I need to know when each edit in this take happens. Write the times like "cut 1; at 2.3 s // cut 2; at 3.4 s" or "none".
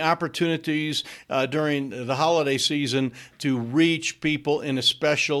none